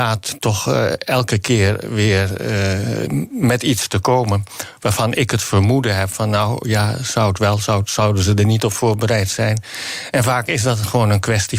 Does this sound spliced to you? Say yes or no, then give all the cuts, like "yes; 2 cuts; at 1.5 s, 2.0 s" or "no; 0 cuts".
no; 0 cuts